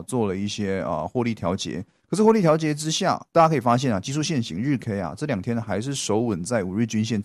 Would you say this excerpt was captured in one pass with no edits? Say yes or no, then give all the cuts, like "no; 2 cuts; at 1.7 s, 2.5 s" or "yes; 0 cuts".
yes; 0 cuts